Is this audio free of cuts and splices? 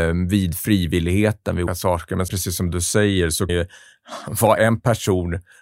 no; 3 cuts; at 1.7 s, 2.3 s, 3.5 s

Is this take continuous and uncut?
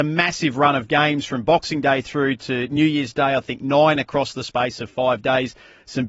yes; 0 cuts

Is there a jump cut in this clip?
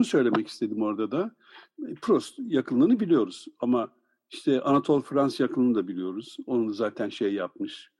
no; 0 cuts

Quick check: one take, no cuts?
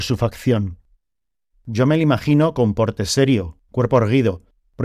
yes; 0 cuts

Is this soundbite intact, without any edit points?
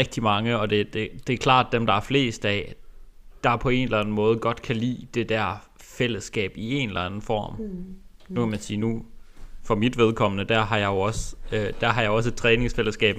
yes; 0 cuts

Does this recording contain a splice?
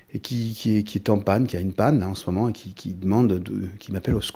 no; 0 cuts

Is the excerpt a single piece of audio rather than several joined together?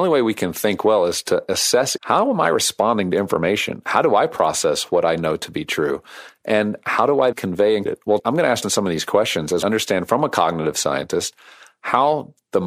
no; 6 cuts; at 2.0 s, 7.3 s, 7.9 s, 8.2 s, 8.6 s, 9.6 s

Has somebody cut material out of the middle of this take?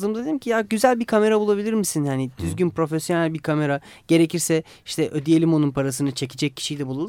no; 0 cuts

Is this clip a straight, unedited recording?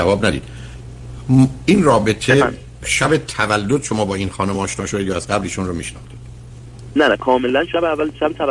yes; 0 cuts

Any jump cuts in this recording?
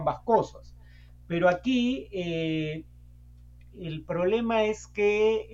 no; 0 cuts

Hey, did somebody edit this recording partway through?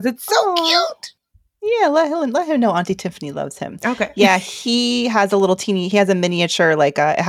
no; 0 cuts

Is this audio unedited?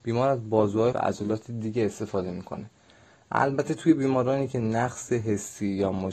no; 1 cut; at 0.9 s

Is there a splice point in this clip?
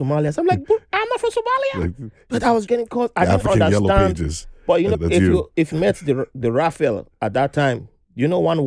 yes; 3 cuts; at 2.7 s, 4.9 s, 5.7 s

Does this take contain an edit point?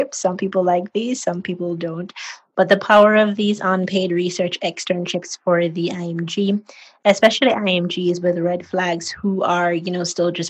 no; 0 cuts

